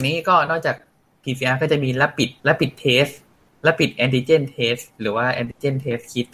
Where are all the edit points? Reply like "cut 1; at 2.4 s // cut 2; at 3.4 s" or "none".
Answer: cut 1; at 2.4 s // cut 2; at 3.3 s